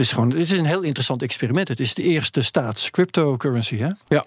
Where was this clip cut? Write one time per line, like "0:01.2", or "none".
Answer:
none